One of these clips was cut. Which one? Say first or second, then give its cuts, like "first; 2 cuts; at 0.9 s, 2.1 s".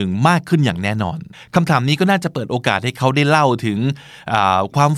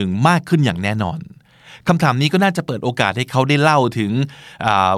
first; 1 cut; at 1.3 s